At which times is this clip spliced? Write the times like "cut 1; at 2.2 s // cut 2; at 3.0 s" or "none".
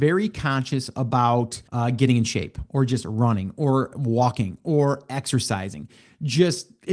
cut 1; at 1.7 s